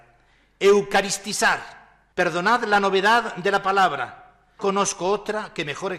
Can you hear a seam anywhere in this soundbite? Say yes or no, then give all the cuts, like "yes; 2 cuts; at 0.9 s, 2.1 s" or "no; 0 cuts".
yes; 2 cuts; at 2.1 s, 4.6 s